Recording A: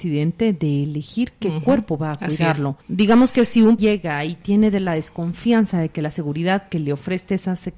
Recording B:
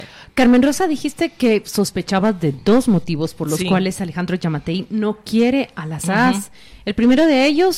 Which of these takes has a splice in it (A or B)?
A